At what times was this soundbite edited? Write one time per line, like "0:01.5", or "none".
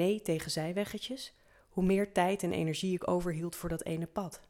none